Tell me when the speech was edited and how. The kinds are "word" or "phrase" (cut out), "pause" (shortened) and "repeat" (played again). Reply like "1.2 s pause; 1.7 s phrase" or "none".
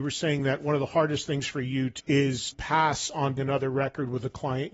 2.0 s word; 2.5 s word; 3.4 s word

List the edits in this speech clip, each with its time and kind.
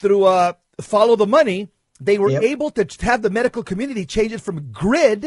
none

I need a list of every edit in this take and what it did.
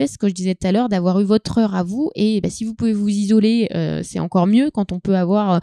none

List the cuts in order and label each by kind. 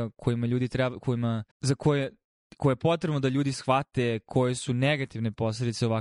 1.5 s pause

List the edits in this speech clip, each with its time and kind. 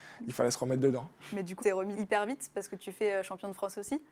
1.6 s word; 1.9 s word

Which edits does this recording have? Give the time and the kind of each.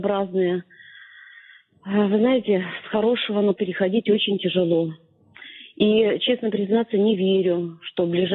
3.5 s word

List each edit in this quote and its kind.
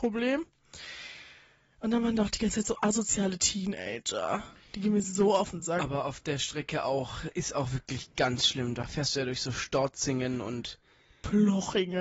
none

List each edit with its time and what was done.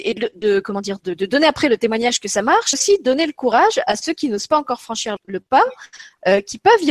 2.7 s word; 5.2 s word

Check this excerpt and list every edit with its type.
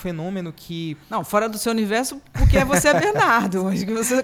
none

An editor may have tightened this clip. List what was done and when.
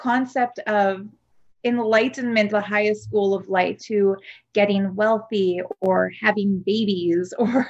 2.5 s word; 3.8 s phrase

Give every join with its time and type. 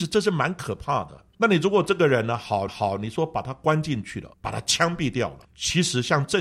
1.3 s pause; 2.7 s repeat; 4.3 s pause; 5.4 s pause

